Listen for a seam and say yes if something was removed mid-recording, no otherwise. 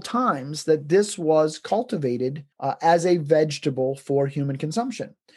yes